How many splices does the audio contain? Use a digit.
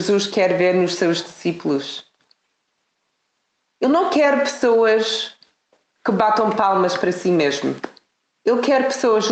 0